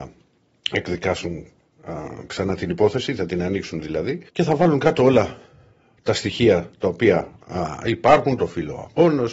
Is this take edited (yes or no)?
yes